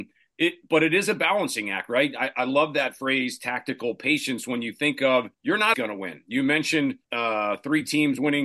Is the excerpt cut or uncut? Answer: cut